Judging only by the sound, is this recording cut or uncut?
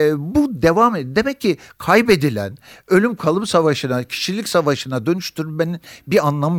uncut